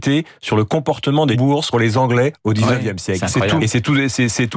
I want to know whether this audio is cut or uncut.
cut